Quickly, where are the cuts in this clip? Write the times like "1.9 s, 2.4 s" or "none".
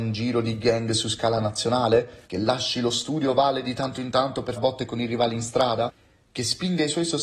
2.2 s, 4.5 s